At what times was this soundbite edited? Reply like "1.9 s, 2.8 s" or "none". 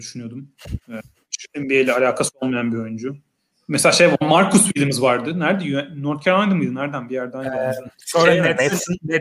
none